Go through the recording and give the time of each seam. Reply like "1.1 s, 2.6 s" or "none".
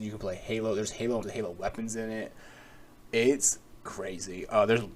1.2 s, 3.9 s